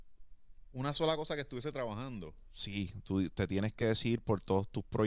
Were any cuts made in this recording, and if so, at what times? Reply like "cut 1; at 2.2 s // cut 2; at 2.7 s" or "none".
none